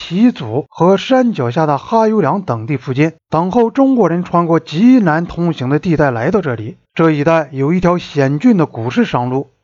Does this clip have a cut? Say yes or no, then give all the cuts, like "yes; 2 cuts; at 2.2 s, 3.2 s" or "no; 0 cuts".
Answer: yes; 2 cuts; at 3.2 s, 6.8 s